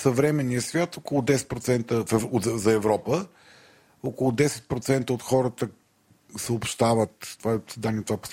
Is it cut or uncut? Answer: uncut